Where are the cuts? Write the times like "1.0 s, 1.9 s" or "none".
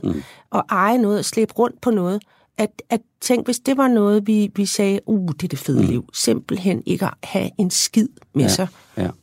none